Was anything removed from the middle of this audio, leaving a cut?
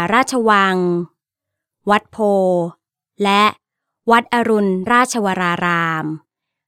no; 0 cuts

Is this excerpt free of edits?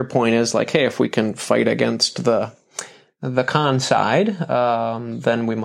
yes; 0 cuts

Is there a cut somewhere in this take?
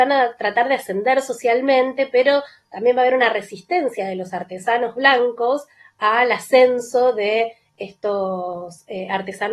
no; 0 cuts

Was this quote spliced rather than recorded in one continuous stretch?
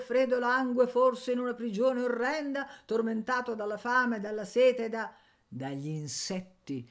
no; 0 cuts

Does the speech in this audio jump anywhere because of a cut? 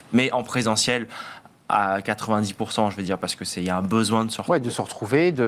no; 0 cuts

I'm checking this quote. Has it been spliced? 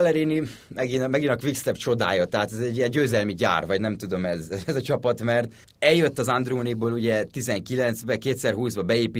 yes; 1 cut; at 5.6 s

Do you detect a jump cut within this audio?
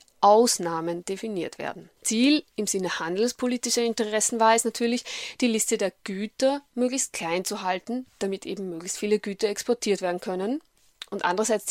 yes; 1 cut; at 2.0 s

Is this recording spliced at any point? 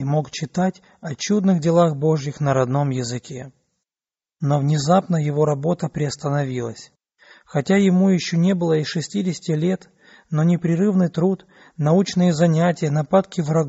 no; 0 cuts

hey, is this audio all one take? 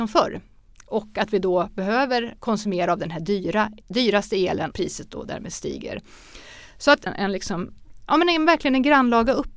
no; 4 cuts; at 2.4 s, 3.8 s, 4.7 s, 7.1 s

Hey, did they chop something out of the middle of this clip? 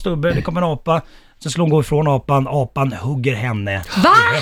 no; 0 cuts

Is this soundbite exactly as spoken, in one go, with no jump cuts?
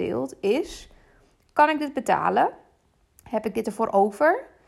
yes; 0 cuts

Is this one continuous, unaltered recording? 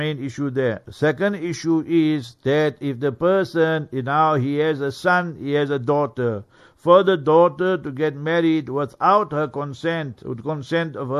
yes; 0 cuts

